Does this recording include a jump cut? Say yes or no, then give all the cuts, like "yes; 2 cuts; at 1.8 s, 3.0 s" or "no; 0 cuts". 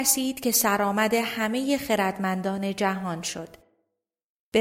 no; 0 cuts